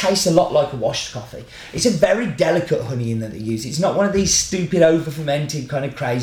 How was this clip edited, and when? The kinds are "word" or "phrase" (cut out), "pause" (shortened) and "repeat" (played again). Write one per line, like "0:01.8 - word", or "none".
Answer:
none